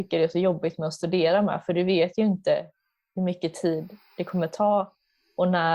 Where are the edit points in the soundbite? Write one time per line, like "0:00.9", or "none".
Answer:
none